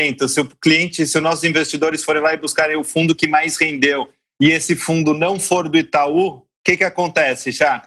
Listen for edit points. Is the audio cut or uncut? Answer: uncut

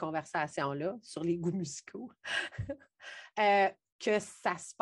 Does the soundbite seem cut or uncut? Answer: uncut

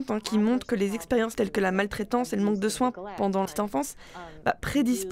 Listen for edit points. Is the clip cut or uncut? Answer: cut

